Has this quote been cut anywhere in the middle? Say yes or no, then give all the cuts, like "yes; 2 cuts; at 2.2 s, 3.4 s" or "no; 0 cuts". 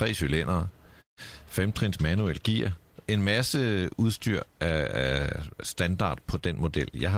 no; 0 cuts